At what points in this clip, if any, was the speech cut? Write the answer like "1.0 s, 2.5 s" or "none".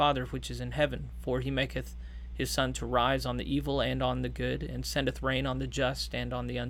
none